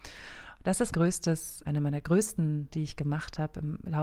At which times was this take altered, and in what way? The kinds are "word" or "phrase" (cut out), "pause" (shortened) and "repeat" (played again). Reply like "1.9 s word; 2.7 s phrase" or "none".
0.9 s word; 1.6 s word; 2.7 s word